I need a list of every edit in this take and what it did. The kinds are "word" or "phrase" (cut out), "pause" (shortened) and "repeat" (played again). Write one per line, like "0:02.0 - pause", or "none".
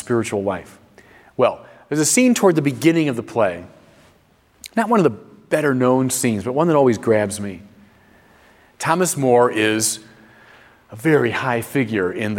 none